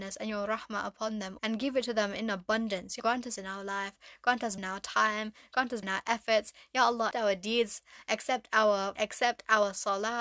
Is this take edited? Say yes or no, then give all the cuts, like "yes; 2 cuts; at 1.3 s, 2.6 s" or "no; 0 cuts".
yes; 7 cuts; at 1.4 s, 3.0 s, 3.4 s, 4.6 s, 5.8 s, 7.1 s, 9.0 s